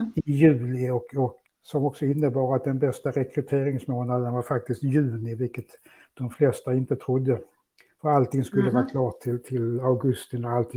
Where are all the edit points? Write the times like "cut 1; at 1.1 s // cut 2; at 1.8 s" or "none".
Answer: cut 1; at 1.5 s